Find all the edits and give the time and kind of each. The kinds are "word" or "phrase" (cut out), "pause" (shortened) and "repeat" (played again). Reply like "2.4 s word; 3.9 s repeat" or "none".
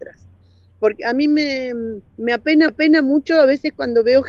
2.1 s pause; 2.7 s repeat